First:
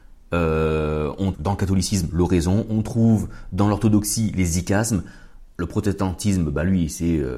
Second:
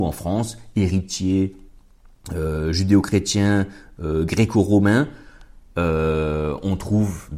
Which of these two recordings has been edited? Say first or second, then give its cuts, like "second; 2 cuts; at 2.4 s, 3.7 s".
first; 2 cuts; at 1.3 s, 5.5 s